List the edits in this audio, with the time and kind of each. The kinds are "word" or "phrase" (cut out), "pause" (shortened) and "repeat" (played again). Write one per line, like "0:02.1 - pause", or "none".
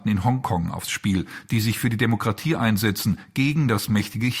none

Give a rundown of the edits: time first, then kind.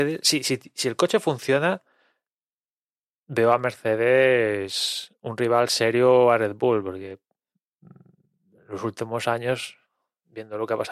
none

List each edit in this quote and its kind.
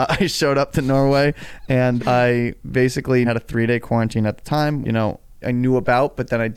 0:02.0 - word
0:03.2 - word
0:04.8 - word
0:05.4 - word

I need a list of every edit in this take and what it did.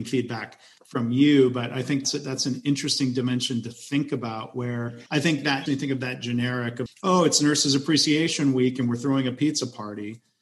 0:02.0 - word
0:05.1 - pause
0:05.7 - phrase
0:06.9 - word

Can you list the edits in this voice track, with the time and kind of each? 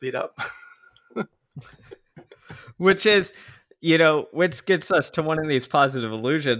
none

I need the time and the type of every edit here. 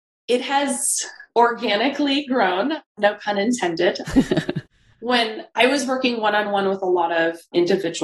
none

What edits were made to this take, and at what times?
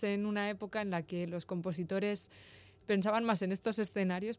none

